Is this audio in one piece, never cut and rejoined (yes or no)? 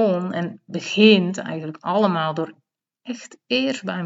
yes